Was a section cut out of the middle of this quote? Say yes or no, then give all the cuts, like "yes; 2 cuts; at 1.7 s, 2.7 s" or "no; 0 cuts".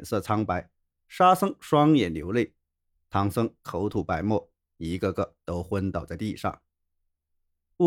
no; 0 cuts